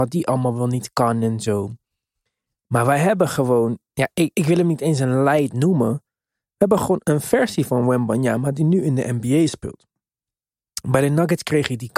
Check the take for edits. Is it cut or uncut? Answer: uncut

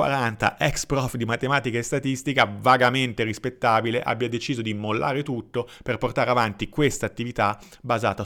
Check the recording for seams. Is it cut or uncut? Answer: uncut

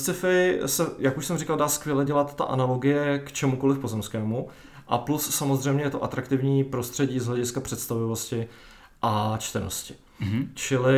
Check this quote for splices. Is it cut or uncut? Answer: uncut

